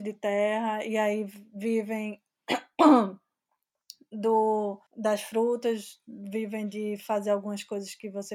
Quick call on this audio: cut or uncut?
cut